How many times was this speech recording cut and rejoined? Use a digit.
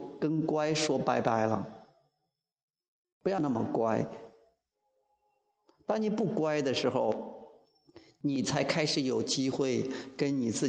0